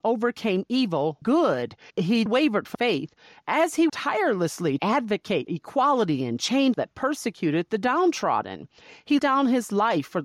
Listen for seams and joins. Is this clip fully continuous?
no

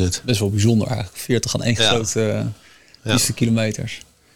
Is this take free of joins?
yes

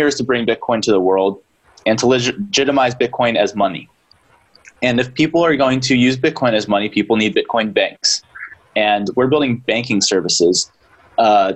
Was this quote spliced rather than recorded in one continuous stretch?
no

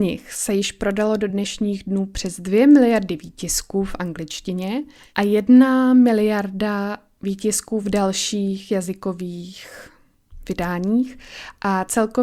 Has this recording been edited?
no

